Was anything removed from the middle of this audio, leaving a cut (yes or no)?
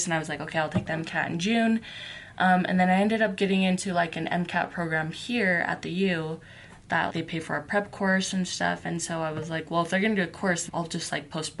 yes